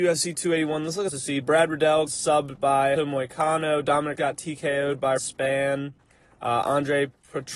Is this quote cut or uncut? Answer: cut